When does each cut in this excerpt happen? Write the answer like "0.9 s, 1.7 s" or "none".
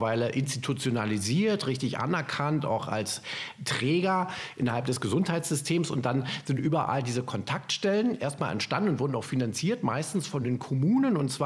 none